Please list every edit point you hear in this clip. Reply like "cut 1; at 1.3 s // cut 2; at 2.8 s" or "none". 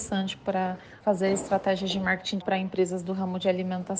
cut 1; at 2.4 s